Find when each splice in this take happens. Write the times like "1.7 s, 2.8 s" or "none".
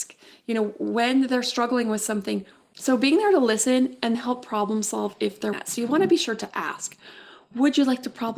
4.1 s, 5.5 s